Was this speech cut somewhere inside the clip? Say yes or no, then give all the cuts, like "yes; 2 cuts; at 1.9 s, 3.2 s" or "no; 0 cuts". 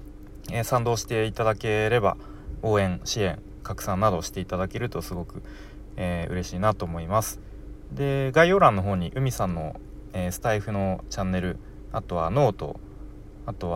yes; 1 cut; at 2.6 s